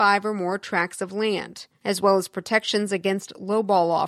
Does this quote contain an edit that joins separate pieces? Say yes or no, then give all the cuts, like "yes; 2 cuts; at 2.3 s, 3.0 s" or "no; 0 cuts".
no; 0 cuts